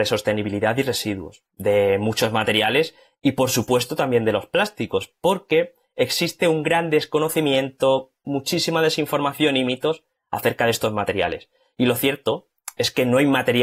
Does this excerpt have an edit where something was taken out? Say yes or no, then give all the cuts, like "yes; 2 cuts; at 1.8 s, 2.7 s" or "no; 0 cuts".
no; 0 cuts